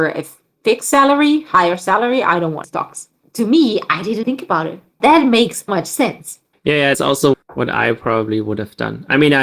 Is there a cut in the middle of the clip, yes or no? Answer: yes